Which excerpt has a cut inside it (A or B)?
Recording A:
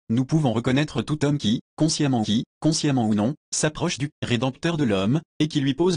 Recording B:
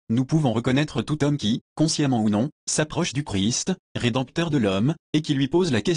A